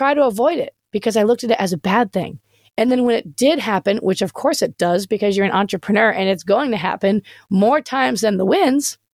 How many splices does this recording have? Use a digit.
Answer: 0